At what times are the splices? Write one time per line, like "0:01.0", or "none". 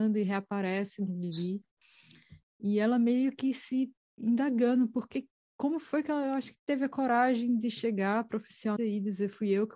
0:08.8